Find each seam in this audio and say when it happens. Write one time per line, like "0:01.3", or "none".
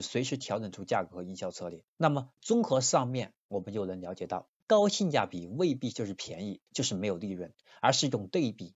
0:01.9
0:02.4
0:06.7